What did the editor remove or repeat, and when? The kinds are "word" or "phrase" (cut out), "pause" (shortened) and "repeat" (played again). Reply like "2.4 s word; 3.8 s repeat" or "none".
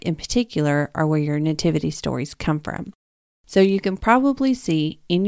none